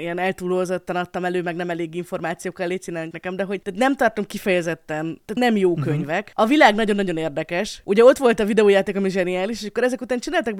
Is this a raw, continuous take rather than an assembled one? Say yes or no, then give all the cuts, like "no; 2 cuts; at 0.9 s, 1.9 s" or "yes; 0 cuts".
no; 2 cuts; at 3.1 s, 5.4 s